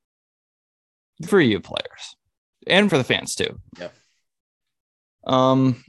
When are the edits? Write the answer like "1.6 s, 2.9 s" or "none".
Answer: 1.3 s, 2.5 s, 2.9 s, 3.8 s